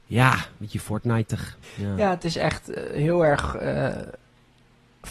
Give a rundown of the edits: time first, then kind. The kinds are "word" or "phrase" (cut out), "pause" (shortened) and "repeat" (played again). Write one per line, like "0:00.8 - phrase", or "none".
0:01.6 - pause